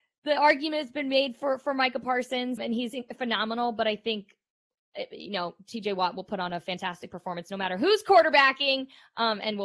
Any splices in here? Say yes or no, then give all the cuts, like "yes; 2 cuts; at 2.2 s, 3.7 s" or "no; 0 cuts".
yes; 1 cut; at 2.6 s